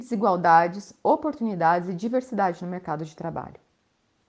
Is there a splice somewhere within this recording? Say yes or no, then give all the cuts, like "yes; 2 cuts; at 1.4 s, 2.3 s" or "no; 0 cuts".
no; 0 cuts